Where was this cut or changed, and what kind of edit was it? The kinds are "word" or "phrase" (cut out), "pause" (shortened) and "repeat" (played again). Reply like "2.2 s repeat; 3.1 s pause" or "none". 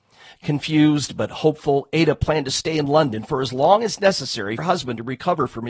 4.6 s word